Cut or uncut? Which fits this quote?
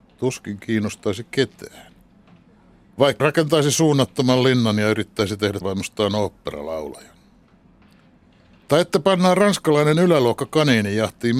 cut